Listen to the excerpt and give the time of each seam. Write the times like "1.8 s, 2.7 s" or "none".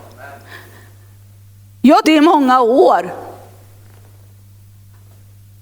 2.0 s